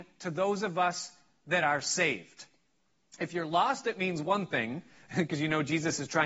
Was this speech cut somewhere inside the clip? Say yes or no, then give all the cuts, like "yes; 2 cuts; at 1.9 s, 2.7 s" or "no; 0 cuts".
no; 0 cuts